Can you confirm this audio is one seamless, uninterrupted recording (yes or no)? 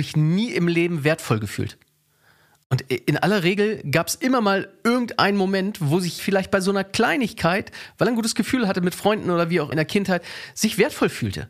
no